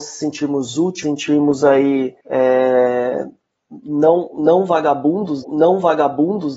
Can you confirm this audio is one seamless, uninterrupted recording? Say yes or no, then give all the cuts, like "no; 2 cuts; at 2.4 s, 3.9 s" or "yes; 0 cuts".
no; 3 cuts; at 1.0 s, 2.2 s, 5.4 s